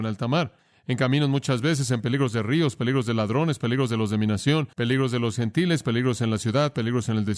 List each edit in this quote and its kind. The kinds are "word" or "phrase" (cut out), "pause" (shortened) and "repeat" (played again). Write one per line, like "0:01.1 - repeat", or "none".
0:04.7 - pause